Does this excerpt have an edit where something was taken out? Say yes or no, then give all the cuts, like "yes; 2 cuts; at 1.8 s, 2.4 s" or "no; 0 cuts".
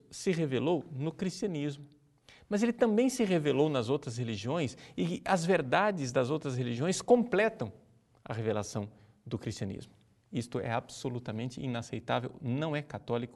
no; 0 cuts